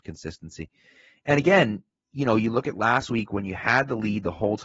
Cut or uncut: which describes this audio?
uncut